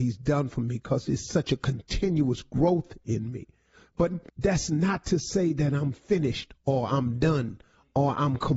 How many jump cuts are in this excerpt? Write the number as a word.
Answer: one